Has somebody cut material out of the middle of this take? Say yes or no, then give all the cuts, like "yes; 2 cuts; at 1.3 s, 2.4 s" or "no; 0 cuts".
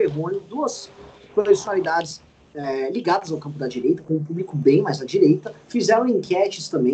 yes; 1 cut; at 5.6 s